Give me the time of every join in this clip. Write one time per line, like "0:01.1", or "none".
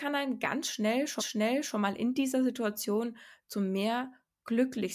0:01.2